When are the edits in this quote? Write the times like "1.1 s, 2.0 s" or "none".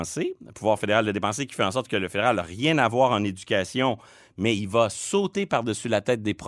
none